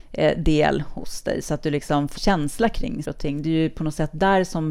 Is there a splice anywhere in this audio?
yes; 2 cuts; at 2.2 s, 3.0 s

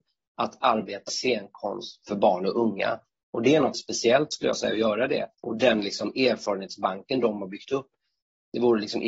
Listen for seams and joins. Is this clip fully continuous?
no; 3 cuts; at 1.1 s, 3.7 s, 5.3 s

